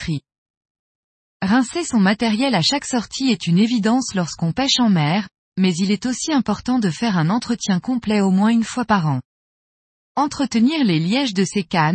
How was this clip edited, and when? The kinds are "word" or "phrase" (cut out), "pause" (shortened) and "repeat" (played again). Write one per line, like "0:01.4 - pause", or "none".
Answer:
none

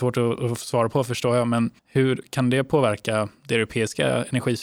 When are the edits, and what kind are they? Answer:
0:01.8 - pause

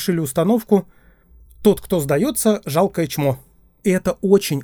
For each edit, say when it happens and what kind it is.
none

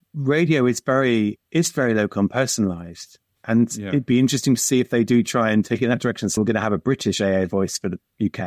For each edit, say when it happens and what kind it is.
0:01.5 - pause
0:06.4 - word

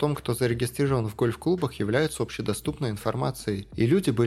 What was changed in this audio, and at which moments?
none

